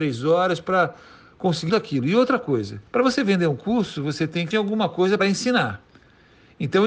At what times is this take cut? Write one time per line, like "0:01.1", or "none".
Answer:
0:01.7
0:02.9
0:04.5
0:05.2